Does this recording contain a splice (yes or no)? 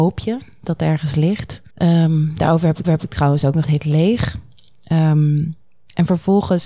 yes